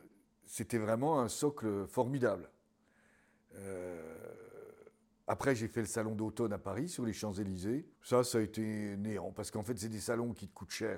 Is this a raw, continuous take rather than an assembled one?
no; 2 cuts; at 5.0 s, 7.9 s

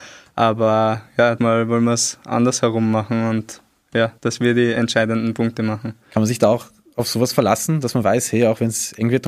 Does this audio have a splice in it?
yes; 2 cuts; at 1.4 s, 4.2 s

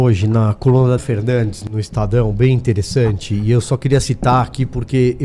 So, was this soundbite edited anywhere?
yes; 1 cut; at 1.0 s

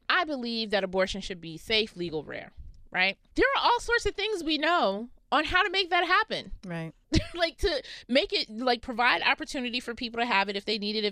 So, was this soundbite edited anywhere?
no; 0 cuts

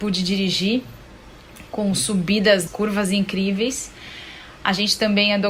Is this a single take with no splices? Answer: no; 1 cut; at 2.7 s

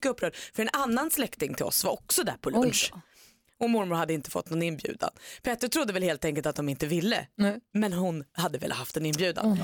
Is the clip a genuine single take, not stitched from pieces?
yes; 0 cuts

